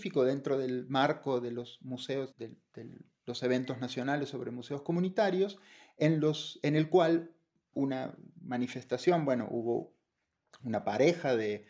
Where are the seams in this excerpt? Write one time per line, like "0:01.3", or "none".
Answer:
0:02.3
0:07.7